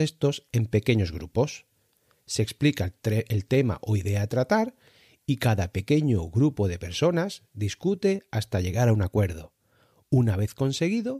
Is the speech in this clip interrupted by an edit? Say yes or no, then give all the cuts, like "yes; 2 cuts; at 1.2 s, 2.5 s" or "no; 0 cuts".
no; 0 cuts